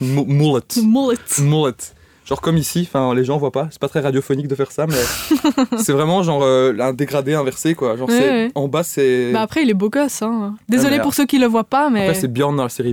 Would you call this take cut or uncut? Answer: uncut